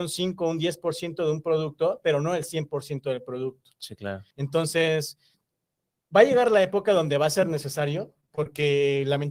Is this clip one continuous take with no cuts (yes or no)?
no